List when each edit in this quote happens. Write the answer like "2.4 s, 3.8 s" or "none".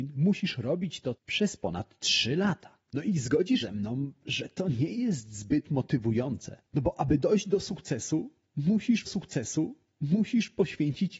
1.1 s, 2.8 s, 3.6 s, 6.7 s, 9.0 s